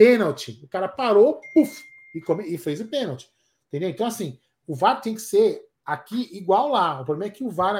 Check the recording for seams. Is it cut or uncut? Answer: uncut